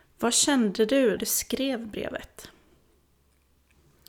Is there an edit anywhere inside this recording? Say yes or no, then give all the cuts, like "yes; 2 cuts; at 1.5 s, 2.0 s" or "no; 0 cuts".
yes; 1 cut; at 1.2 s